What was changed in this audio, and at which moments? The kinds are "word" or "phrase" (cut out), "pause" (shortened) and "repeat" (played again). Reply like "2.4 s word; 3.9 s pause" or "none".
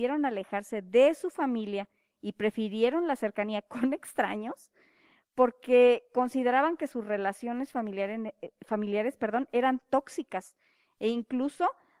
none